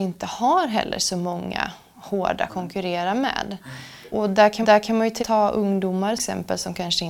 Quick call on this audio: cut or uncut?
cut